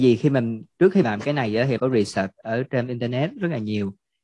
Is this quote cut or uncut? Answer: cut